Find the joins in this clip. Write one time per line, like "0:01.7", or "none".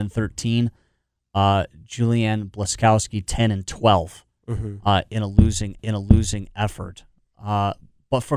0:05.8